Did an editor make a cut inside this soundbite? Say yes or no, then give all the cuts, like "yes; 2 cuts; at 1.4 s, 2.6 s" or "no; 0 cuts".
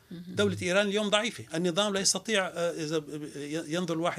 no; 0 cuts